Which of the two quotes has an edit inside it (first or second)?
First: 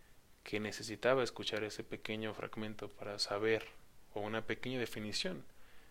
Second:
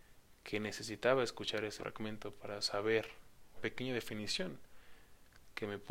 second